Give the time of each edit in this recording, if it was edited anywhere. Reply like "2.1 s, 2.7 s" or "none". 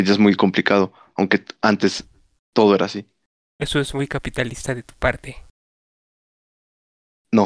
none